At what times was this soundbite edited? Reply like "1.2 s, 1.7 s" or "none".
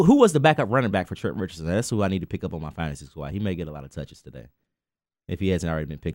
none